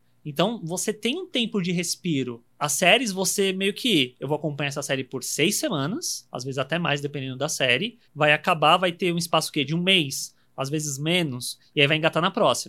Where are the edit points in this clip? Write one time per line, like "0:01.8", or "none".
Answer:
0:02.5
0:08.0